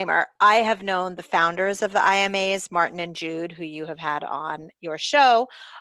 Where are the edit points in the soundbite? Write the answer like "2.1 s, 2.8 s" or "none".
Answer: none